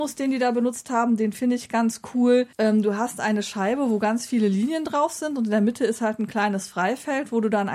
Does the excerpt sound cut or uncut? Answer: cut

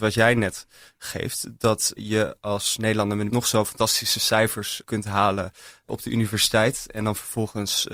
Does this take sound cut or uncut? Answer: cut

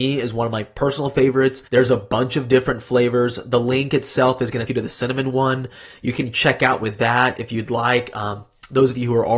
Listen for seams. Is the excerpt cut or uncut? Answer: cut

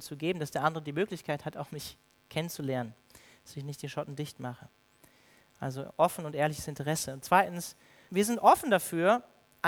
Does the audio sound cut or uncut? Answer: cut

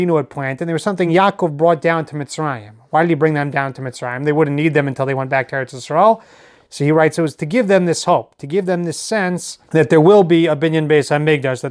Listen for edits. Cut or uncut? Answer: uncut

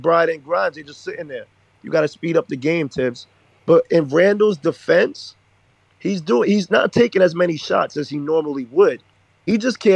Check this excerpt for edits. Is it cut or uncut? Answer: uncut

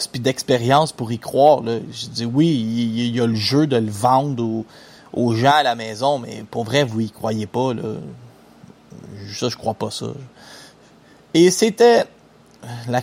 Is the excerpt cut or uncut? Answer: uncut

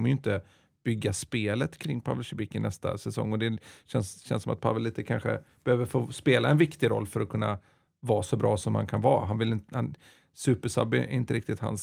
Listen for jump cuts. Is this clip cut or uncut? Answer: uncut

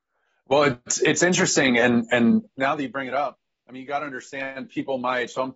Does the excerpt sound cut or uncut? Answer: cut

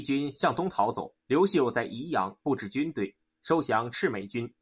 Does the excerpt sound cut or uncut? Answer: cut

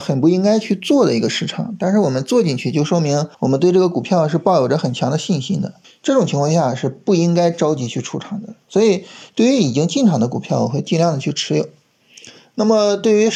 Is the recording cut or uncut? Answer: cut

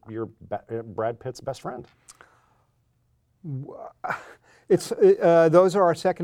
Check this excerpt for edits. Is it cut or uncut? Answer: uncut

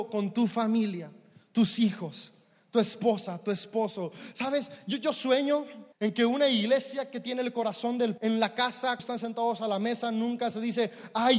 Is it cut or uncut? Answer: cut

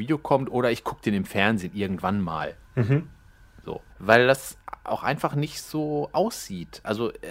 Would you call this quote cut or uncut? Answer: cut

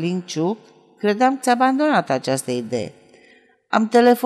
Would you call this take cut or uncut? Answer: cut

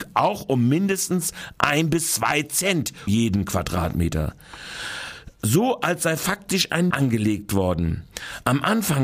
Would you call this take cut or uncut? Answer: cut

